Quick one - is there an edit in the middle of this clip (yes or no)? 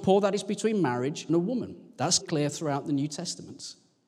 yes